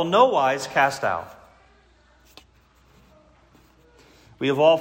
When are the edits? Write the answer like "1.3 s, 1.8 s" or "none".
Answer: none